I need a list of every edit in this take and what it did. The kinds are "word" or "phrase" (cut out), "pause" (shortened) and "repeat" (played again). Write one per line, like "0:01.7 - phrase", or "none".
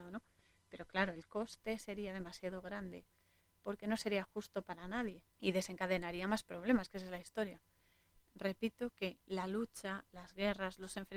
0:05.3 - pause